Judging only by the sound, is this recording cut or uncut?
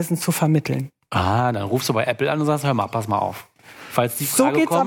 uncut